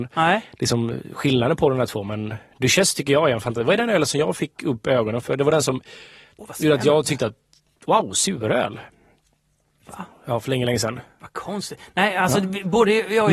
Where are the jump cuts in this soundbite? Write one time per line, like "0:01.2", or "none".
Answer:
none

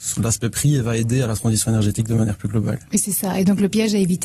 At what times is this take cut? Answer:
none

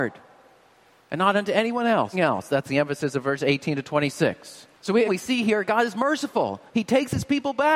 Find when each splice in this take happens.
0:02.1
0:04.7
0:05.1
0:06.7

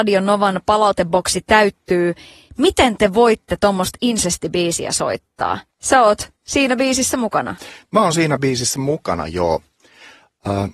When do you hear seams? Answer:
0:05.7
0:06.4

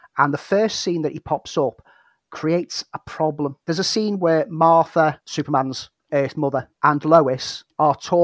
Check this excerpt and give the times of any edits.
none

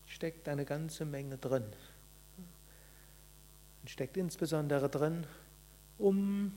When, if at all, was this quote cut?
none

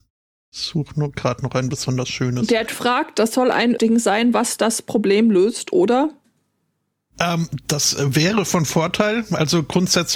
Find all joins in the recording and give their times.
0:02.7
0:03.8

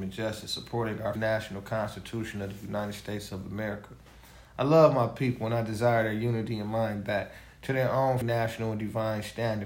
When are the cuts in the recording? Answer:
0:01.1
0:08.2

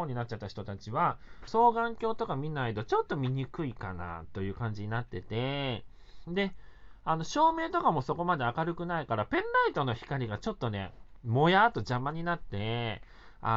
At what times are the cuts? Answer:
0:01.5

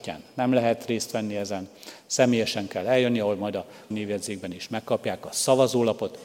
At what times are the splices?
0:03.9

